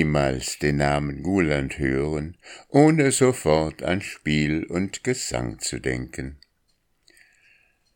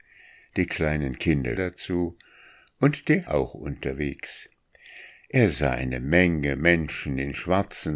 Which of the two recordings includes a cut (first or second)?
second